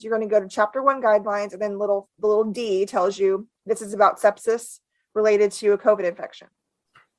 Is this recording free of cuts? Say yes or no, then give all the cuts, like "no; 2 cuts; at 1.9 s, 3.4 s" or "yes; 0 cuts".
yes; 0 cuts